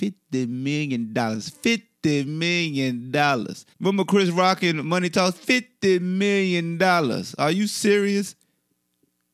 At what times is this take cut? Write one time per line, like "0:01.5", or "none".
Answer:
0:03.7